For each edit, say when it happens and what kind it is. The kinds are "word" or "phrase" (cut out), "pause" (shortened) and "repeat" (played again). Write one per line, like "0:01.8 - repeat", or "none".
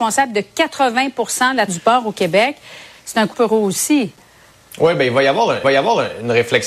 0:01.7 - word
0:03.3 - word
0:04.5 - pause
0:05.6 - repeat